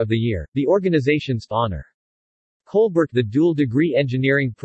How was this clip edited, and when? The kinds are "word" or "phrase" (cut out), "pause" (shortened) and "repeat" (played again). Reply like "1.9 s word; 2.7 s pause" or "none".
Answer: 1.5 s word; 3.1 s word